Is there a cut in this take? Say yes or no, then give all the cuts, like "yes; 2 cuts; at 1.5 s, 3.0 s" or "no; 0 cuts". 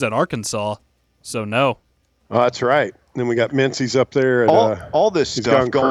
no; 0 cuts